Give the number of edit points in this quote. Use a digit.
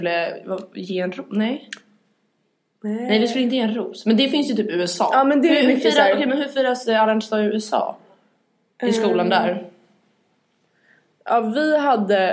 0